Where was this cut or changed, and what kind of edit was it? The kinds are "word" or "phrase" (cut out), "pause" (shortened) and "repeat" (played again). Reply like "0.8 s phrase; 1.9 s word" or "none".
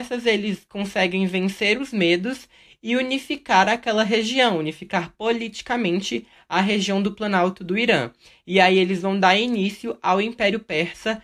none